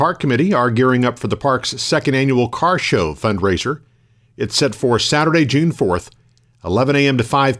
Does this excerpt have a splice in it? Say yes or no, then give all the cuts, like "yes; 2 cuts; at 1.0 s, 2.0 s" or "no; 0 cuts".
no; 0 cuts